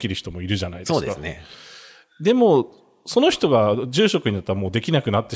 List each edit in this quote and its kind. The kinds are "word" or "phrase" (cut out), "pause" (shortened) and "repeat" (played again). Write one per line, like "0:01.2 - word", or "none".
none

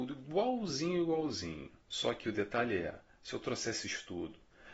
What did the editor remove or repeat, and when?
0:01.8 - pause

